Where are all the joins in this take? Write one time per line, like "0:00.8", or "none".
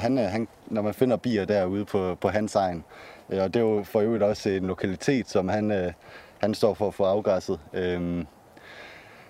none